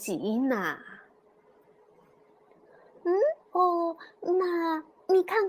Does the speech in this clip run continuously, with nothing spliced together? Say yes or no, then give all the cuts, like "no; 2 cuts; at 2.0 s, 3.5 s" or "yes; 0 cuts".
no; 1 cut; at 3.4 s